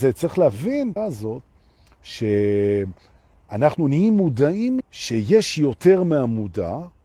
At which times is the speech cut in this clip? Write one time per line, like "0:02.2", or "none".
0:01.0
0:04.8